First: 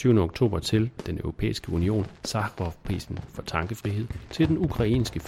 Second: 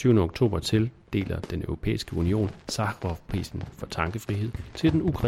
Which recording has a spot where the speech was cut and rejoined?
first; 1 cut; at 1.0 s

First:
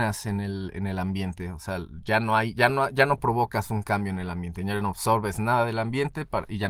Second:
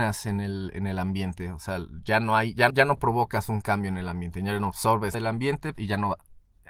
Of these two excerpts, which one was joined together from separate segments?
second; 3 cuts; at 2.7 s, 5.1 s, 5.7 s

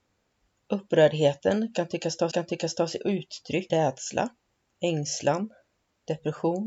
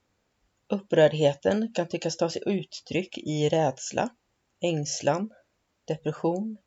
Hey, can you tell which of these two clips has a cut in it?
first; 2 cuts; at 2.3 s, 3.7 s

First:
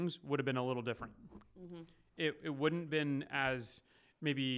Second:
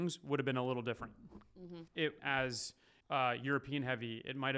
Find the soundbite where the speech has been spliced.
second; 3 cuts; at 1.9 s, 2.2 s, 3.0 s

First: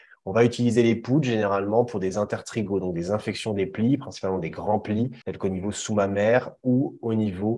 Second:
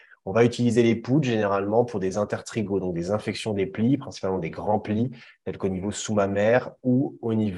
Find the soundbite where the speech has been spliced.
first; 1 cut; at 5.2 s

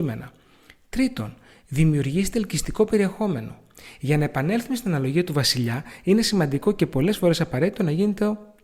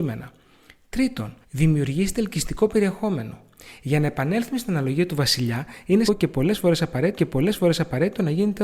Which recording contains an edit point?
second; 3 cuts; at 1.4 s, 6.1 s, 7.2 s

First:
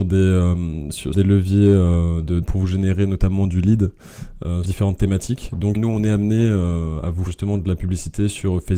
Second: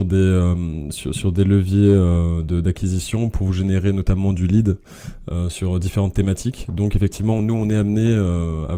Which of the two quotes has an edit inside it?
first; 5 cuts; at 1.1 s, 2.4 s, 4.6 s, 5.7 s, 7.3 s

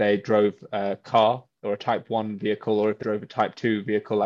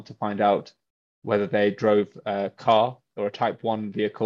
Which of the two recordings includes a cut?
first; 1 cut; at 3.0 s

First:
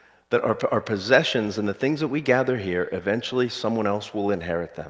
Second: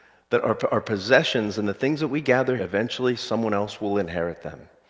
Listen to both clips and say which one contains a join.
second; 1 cut; at 2.6 s

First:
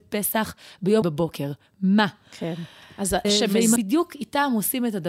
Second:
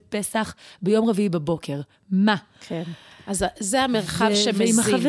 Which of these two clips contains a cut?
first; 3 cuts; at 1.0 s, 3.2 s, 3.8 s

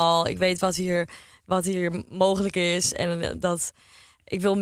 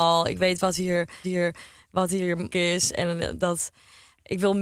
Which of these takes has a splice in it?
second; 2 cuts; at 1.2 s, 2.5 s

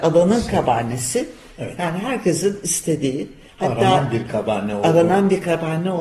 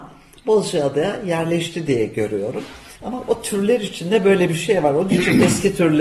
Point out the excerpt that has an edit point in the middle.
second; 1 cut; at 3.0 s

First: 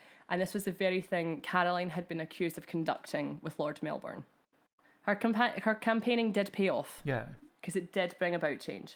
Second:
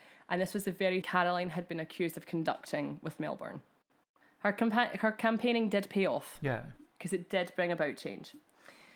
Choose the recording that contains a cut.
second; 2 cuts; at 1.0 s, 3.2 s

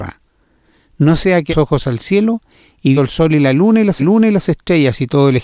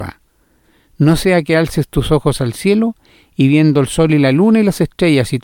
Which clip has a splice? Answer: first; 3 cuts; at 1.5 s, 2.9 s, 4.0 s

